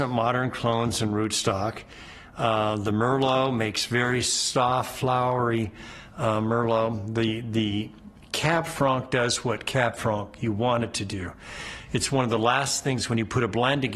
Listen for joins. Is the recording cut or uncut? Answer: uncut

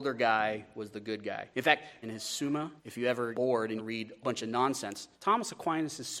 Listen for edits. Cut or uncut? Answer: cut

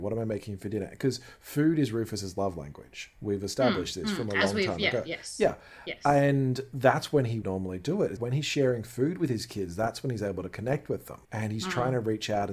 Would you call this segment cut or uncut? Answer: cut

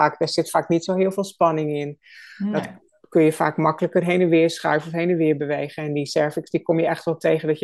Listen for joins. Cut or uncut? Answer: uncut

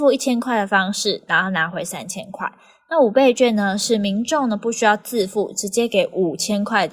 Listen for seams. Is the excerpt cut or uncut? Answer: uncut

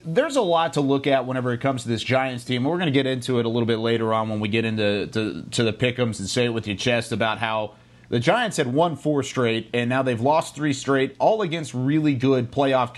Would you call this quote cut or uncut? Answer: uncut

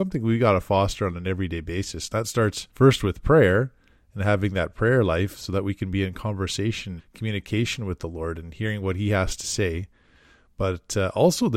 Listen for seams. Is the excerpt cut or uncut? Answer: cut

